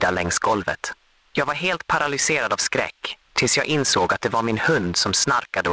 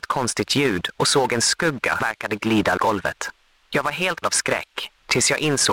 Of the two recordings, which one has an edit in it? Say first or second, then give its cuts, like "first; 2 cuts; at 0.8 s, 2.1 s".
second; 3 cuts; at 2.0 s, 2.8 s, 4.2 s